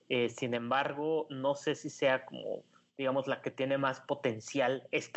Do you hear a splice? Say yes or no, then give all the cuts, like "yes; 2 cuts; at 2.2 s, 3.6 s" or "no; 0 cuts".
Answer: no; 0 cuts